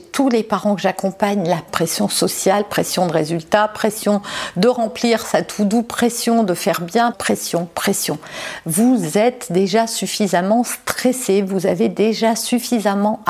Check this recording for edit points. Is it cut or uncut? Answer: cut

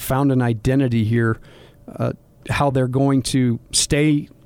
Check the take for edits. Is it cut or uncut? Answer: uncut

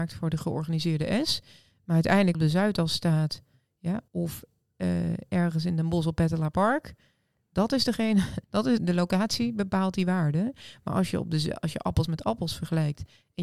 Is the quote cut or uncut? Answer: cut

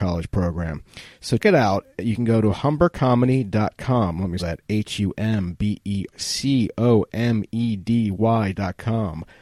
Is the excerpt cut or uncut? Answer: cut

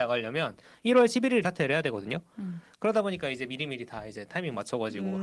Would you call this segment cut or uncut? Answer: cut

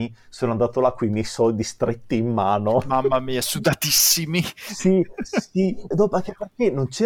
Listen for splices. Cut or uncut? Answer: cut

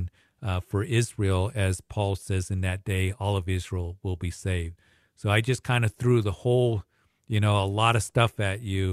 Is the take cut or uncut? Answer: uncut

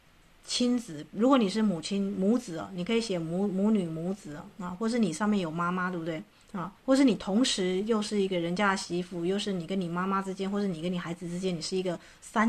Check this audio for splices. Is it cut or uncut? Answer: cut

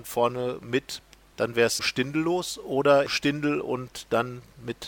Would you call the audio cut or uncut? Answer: cut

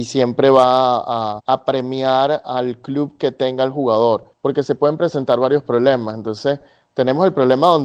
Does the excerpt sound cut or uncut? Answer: cut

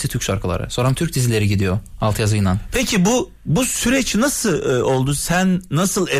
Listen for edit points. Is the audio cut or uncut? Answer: uncut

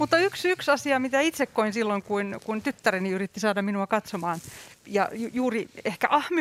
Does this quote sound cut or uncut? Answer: uncut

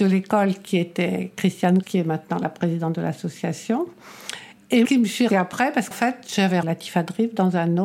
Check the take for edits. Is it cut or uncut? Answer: cut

